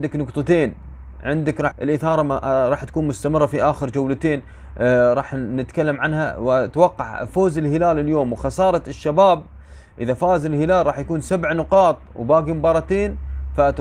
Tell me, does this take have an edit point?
yes; 1 cut; at 1.7 s

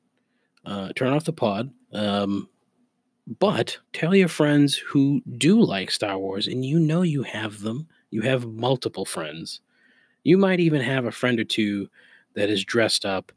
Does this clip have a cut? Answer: yes; 2 cuts; at 1.8 s, 3.8 s

